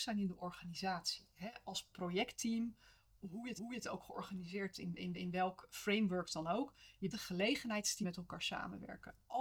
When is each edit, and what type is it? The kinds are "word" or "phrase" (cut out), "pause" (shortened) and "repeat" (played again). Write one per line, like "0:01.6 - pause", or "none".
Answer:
0:03.6 - repeat
0:04.7 - word
0:05.1 - repeat
0:07.1 - word
0:08.0 - word